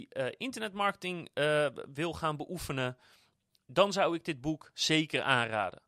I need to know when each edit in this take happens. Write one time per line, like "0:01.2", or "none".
none